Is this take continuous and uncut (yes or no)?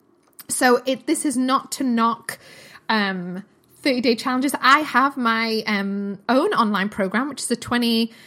yes